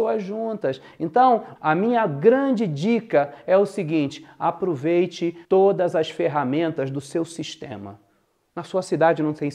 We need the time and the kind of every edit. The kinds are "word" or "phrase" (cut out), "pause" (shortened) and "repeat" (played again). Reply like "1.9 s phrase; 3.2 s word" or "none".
1.6 s word; 5.4 s pause